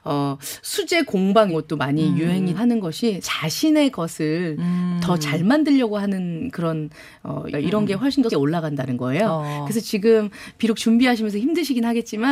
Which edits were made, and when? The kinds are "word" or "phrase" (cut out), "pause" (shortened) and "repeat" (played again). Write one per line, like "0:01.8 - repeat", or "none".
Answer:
0:01.5 - word
0:02.5 - word
0:03.2 - word
0:07.5 - word
0:08.3 - word